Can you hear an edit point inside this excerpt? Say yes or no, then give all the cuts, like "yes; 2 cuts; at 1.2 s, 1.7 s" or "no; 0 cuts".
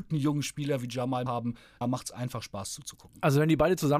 yes; 2 cuts; at 1.3 s, 1.8 s